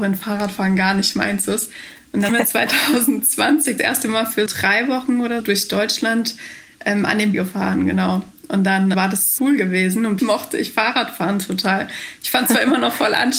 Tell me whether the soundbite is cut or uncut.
cut